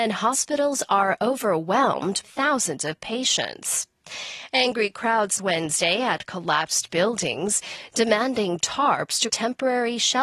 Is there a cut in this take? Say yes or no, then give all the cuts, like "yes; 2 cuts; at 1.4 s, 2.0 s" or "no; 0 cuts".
yes; 3 cuts; at 2.2 s, 5.4 s, 9.3 s